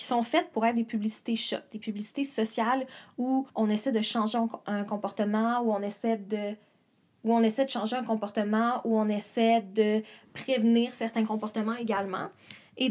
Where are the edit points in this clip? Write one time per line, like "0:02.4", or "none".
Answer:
0:03.5